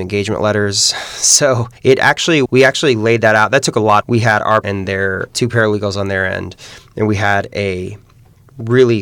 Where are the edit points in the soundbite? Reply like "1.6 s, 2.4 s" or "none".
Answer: 1.8 s, 2.5 s, 4.0 s, 4.6 s, 5.3 s